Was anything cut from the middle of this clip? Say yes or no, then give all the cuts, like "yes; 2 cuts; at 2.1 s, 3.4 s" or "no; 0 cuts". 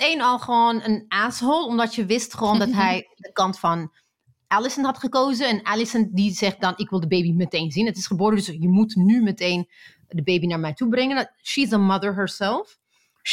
no; 0 cuts